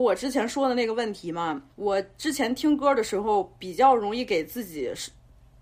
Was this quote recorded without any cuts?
no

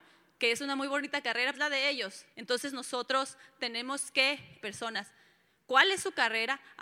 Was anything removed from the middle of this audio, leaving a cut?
yes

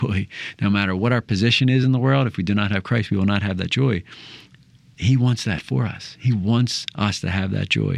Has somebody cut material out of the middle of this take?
no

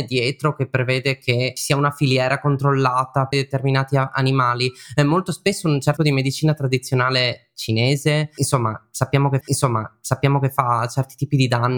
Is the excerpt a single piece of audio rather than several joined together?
no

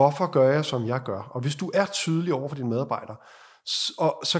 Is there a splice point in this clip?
no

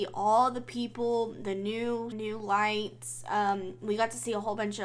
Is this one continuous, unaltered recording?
no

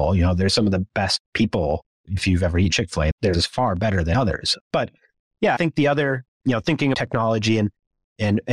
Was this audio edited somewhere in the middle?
yes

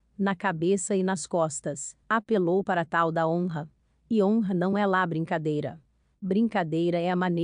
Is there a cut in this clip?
no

